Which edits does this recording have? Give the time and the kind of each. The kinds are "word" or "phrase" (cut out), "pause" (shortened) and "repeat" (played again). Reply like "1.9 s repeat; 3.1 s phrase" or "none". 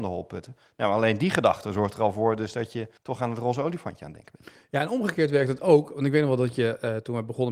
3.0 s pause